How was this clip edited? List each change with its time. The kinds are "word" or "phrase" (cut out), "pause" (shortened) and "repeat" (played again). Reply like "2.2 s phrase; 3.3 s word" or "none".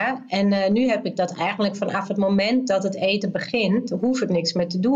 none